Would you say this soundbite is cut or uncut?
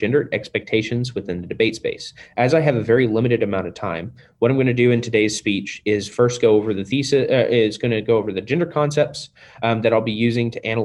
uncut